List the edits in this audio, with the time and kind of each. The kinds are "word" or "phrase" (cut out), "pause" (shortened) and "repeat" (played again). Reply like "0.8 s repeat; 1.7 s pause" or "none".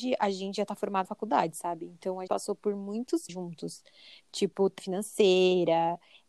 1.0 s word; 2.3 s word; 3.3 s word; 4.8 s word